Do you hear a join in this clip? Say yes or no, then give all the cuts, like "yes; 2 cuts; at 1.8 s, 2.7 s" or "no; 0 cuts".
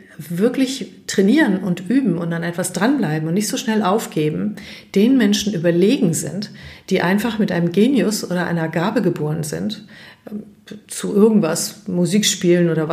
no; 0 cuts